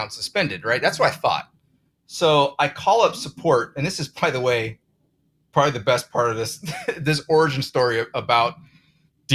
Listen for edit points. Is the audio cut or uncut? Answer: uncut